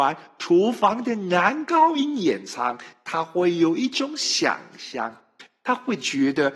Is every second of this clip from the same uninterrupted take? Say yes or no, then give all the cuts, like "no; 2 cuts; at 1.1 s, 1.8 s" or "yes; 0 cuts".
yes; 0 cuts